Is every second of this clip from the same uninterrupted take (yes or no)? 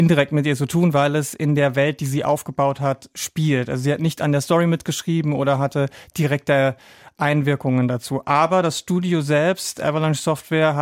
yes